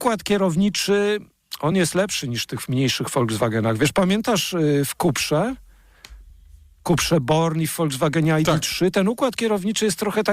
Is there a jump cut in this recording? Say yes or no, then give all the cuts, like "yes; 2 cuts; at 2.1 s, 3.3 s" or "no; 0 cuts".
no; 0 cuts